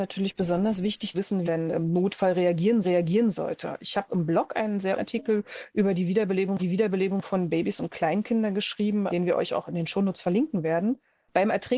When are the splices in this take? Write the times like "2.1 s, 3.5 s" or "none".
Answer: 1.1 s, 1.4 s, 2.8 s, 4.1 s, 5.0 s, 6.6 s, 9.1 s